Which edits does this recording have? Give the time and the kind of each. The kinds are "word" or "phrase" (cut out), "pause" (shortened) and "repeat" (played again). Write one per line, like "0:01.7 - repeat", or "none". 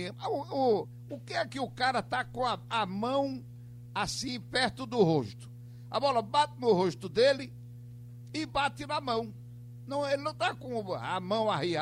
none